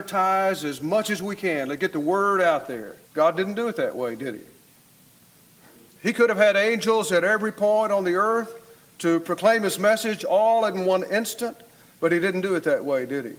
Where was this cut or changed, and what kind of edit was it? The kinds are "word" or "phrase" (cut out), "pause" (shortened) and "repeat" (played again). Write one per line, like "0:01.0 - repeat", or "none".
0:03.0 - pause

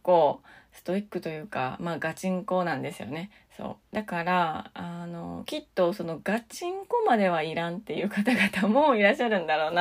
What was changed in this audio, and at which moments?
0:03.9 - pause

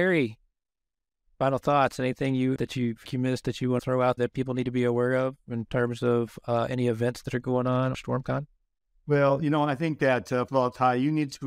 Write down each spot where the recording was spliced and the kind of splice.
0:02.6 - word
0:03.1 - word
0:03.8 - word
0:04.2 - word
0:07.9 - word
0:10.5 - word

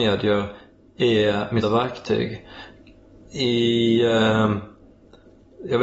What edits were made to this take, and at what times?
0:01.6 - word

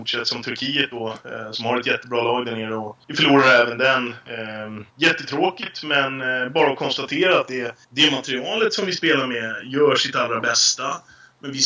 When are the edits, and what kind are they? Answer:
0:03.0 - pause
0:04.9 - pause
0:07.8 - pause

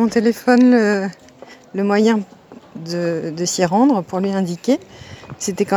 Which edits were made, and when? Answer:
none

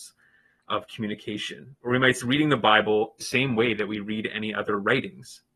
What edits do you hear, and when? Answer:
0:02.2 - word
0:03.2 - word

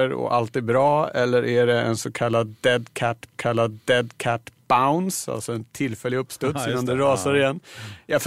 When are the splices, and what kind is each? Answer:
0:03.4 - repeat

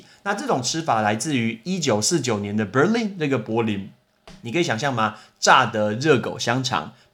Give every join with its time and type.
0:04.4 - pause

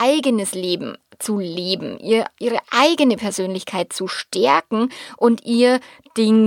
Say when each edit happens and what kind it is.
none

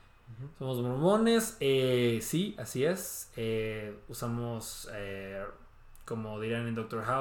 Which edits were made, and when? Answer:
none

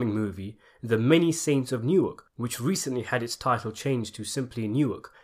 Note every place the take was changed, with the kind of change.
0:02.3 - pause

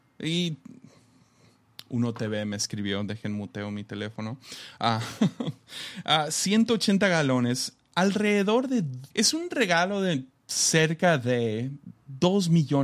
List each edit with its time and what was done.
0:09.1 - pause

